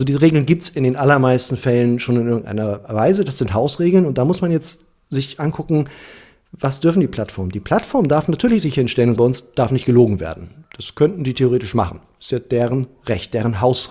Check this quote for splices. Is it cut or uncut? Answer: cut